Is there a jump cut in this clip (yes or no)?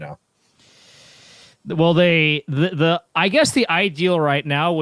no